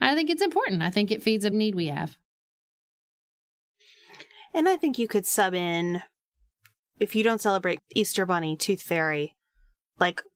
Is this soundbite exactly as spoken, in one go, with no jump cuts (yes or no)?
no